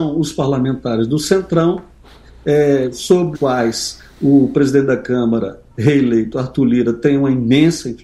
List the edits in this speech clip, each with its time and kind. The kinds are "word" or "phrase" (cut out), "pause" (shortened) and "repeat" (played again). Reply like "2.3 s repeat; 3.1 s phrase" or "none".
3.3 s word